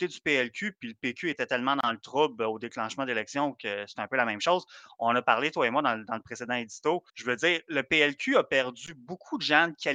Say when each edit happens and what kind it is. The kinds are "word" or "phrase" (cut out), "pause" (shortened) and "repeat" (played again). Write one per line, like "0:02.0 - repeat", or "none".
0:01.3 - word
0:07.1 - pause